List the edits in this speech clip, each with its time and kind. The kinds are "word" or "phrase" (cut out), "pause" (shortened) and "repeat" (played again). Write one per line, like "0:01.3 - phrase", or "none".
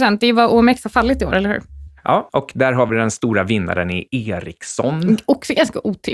none